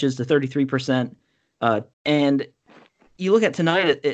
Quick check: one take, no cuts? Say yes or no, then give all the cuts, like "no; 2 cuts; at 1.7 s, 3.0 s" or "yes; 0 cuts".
no; 1 cut; at 1.9 s